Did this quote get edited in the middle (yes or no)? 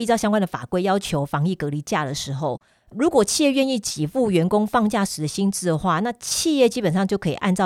no